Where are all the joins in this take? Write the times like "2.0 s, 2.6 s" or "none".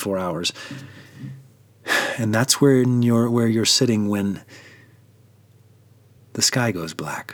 none